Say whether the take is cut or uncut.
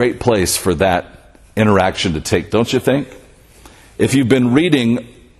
cut